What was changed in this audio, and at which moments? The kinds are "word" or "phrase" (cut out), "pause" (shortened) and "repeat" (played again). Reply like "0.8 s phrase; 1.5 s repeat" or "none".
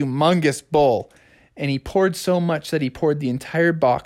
none